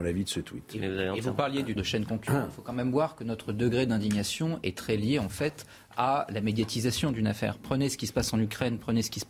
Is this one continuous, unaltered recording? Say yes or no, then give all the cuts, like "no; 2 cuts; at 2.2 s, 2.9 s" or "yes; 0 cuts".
no; 1 cut; at 1.8 s